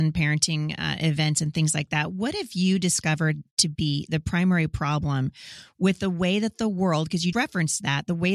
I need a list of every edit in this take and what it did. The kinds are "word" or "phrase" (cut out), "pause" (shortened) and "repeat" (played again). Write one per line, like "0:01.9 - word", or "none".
0:07.3 - word